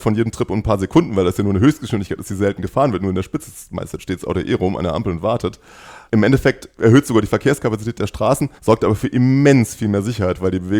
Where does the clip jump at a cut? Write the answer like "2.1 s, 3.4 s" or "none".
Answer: 8.6 s